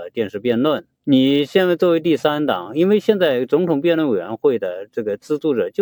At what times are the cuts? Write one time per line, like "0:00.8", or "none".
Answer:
0:00.9